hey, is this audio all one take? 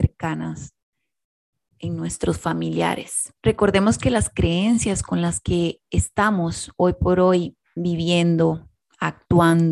no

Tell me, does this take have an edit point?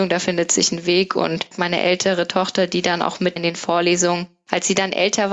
yes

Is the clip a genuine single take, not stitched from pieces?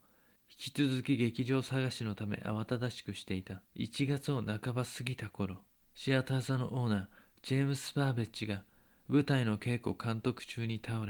no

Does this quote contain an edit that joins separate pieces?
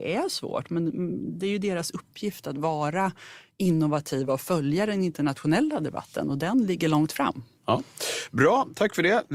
no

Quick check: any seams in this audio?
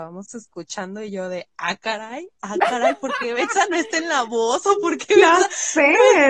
no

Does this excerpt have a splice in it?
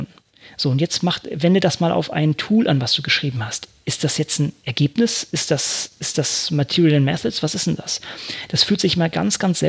no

